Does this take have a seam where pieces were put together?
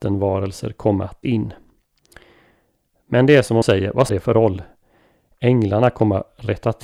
yes; 3 cuts; at 1.2 s, 3.6 s, 4.1 s

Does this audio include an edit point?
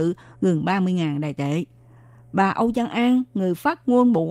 no; 0 cuts

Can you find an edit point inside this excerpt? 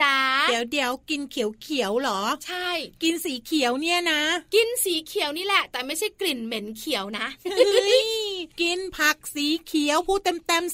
yes; 1 cut; at 8.5 s

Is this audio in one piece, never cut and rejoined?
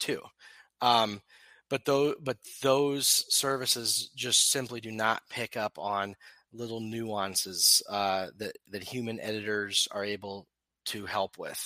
yes; 0 cuts

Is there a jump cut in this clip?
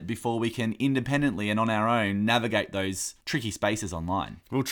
yes; 1 cut; at 3.2 s

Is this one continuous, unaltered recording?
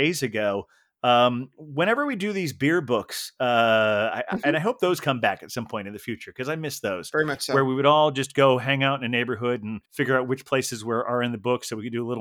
no; 1 cut; at 9.9 s

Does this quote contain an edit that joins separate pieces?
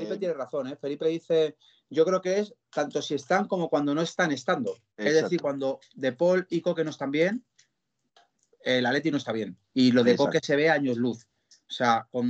yes; 3 cuts; at 1.0 s, 4.9 s, 9.6 s

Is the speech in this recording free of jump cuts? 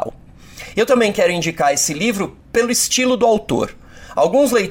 yes; 0 cuts

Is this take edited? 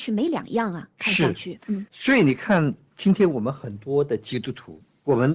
yes; 1 cut; at 1.9 s

